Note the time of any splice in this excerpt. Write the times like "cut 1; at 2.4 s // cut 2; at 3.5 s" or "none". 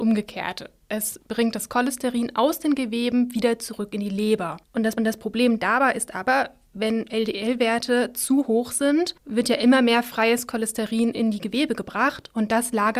cut 1; at 4.6 s // cut 2; at 5.0 s // cut 3; at 7.1 s // cut 4; at 9.2 s